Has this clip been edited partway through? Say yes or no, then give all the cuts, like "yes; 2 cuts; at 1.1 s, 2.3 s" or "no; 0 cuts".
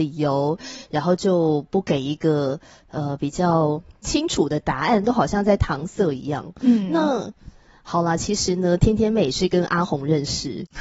no; 0 cuts